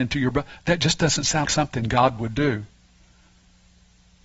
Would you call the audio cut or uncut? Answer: cut